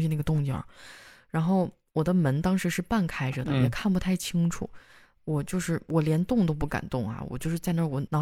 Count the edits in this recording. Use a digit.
0